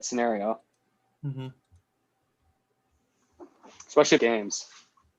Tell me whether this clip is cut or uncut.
cut